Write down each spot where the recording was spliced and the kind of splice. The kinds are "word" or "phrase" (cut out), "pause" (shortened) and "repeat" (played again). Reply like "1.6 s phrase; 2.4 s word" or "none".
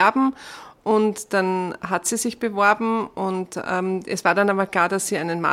none

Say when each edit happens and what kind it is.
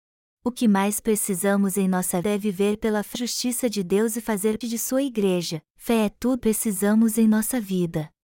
2.2 s word; 3.1 s word; 4.6 s word; 5.7 s pause; 6.4 s phrase

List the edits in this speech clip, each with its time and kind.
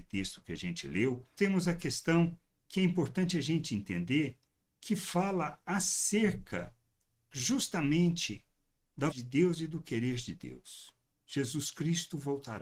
1.4 s word; 9.1 s word

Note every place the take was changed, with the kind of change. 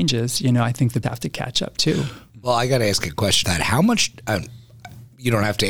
1.0 s word; 3.4 s word

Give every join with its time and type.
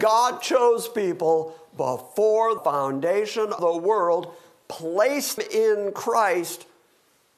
2.6 s word; 3.6 s word; 5.4 s word

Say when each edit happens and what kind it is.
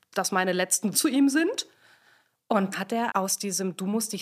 0.9 s word; 2.7 s word; 3.1 s word

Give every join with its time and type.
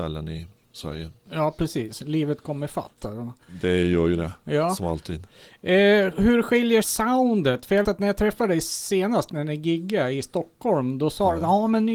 6.8 s word; 7.8 s word

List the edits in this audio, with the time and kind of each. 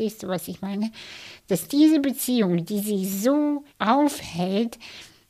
3.7 s pause

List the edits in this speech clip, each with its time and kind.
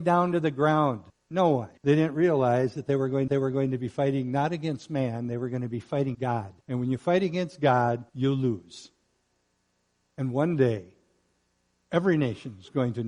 1.1 s pause; 1.8 s pause; 3.3 s repeat; 6.1 s word; 6.6 s pause; 8.1 s pause

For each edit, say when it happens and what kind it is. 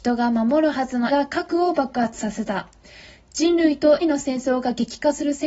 1.1 s word; 4.0 s word

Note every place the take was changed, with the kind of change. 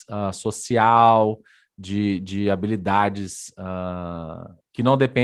none

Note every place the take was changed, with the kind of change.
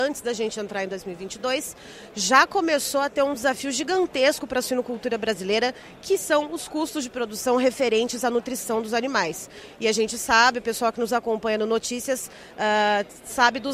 none

